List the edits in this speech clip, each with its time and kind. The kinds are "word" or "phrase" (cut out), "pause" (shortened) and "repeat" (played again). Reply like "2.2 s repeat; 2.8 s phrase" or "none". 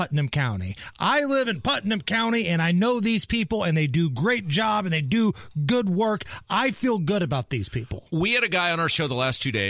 none

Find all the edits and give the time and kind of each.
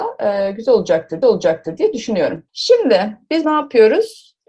1.2 s repeat; 2.5 s pause; 3.4 s phrase

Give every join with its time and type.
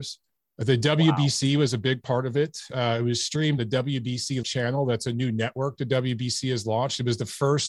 3.6 s word; 4.4 s word

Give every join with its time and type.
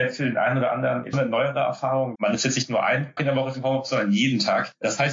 1.1 s word; 2.1 s word; 3.2 s word; 3.5 s word

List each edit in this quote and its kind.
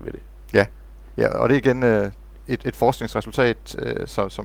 none

